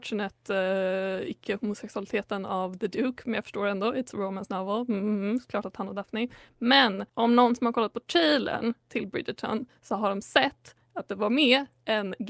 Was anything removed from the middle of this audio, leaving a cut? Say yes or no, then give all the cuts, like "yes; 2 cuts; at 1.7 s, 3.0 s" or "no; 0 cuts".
yes; 1 cut; at 7.1 s